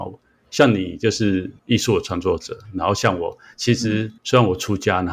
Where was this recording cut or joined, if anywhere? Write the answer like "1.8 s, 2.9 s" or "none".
1.6 s, 4.2 s